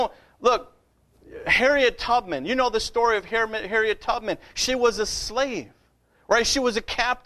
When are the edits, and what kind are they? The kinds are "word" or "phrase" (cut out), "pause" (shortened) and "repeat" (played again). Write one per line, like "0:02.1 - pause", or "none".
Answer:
none